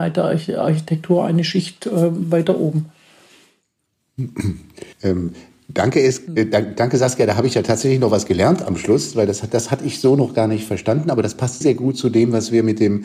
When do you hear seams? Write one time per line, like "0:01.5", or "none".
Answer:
0:04.9
0:11.6